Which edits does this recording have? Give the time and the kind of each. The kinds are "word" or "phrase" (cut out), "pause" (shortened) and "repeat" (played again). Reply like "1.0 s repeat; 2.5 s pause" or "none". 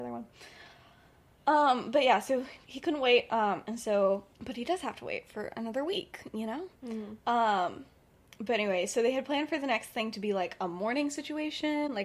4.3 s pause